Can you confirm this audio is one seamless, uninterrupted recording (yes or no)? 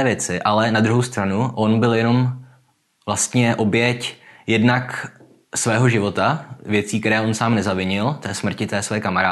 yes